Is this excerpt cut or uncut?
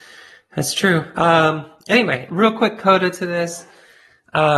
cut